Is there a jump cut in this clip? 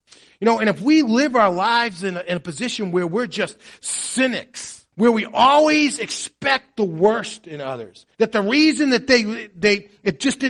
no; 0 cuts

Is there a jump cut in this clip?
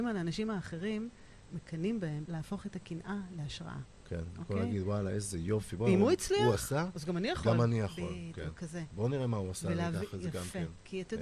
yes; 2 cuts; at 1.5 s, 2.3 s

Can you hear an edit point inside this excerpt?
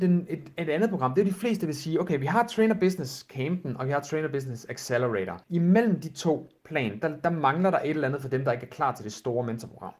yes; 1 cut; at 5.4 s

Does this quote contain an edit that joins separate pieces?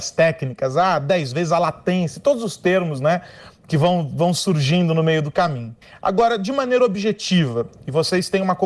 yes; 1 cut; at 5.8 s

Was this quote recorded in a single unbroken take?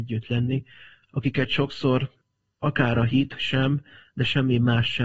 yes; 0 cuts

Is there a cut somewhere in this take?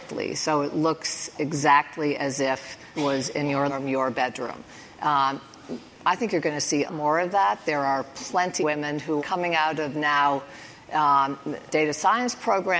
yes; 6 cuts; at 2.9 s, 3.7 s, 6.9 s, 8.6 s, 9.2 s, 11.7 s

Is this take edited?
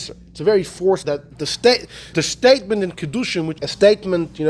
yes; 3 cuts; at 1.0 s, 2.1 s, 3.6 s

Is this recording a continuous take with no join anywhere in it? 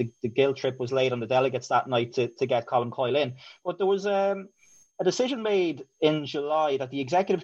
yes; 0 cuts

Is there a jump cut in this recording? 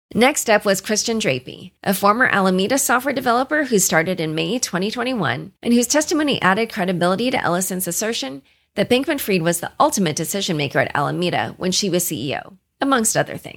yes; 2 cuts; at 1.8 s, 5.6 s

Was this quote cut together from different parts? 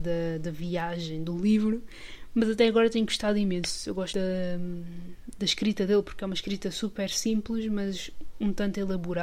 yes; 1 cut; at 4.1 s

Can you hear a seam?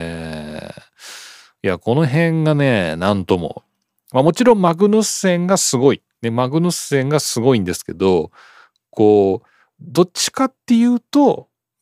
no; 0 cuts

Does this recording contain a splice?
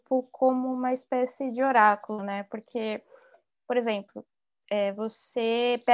no; 0 cuts

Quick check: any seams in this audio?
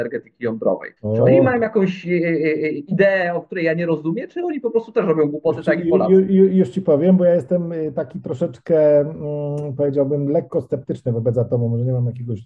yes; 1 cut; at 1.0 s

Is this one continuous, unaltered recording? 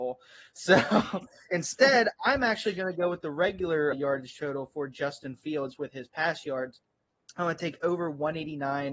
no; 1 cut; at 3.9 s

